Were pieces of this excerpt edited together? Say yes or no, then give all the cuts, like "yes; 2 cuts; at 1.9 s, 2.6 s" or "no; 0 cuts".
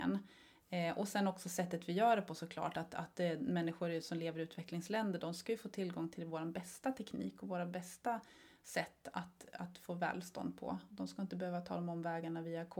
no; 0 cuts